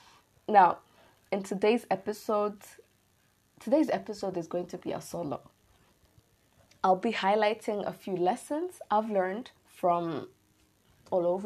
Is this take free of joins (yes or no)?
no